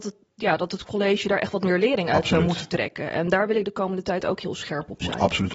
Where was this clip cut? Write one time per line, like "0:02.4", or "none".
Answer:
none